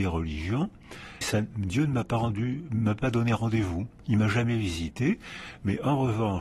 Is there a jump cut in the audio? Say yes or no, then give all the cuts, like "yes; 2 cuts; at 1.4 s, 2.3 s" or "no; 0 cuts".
yes; 1 cut; at 1.2 s